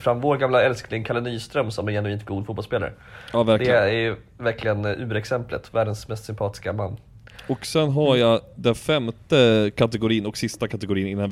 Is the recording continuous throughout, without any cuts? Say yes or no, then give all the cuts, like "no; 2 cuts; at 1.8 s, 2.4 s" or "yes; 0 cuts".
yes; 0 cuts